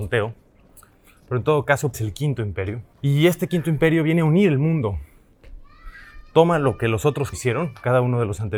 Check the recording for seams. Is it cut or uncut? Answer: cut